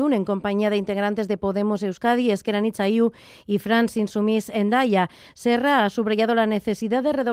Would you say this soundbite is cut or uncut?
uncut